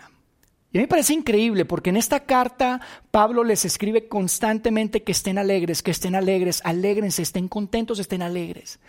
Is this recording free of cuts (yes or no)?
yes